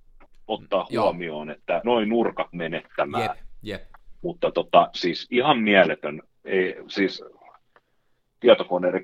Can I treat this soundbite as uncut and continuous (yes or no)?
no